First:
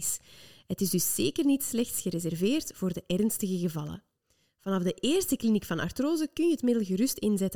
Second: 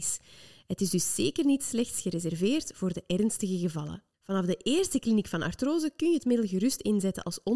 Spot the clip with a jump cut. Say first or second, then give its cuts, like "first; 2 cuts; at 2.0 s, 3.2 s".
second; 1 cut; at 4.1 s